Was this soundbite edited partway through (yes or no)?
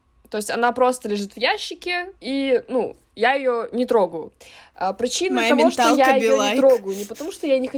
yes